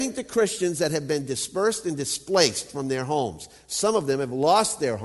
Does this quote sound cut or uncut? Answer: uncut